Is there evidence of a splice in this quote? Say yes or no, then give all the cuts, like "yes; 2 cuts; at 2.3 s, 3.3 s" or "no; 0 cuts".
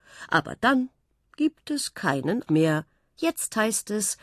yes; 1 cut; at 2.5 s